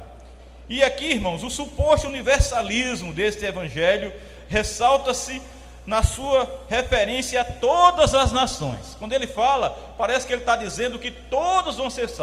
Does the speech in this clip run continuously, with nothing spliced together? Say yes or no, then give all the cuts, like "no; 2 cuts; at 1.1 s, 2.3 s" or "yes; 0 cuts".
yes; 0 cuts